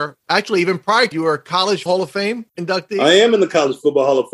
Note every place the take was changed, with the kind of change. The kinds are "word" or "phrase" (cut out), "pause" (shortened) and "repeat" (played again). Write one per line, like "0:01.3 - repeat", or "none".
0:01.1 - word
0:01.9 - word